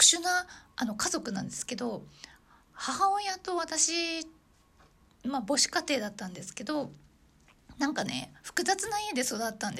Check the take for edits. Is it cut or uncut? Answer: uncut